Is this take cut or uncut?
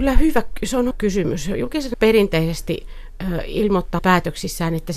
cut